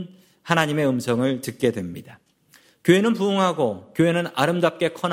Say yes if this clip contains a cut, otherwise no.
no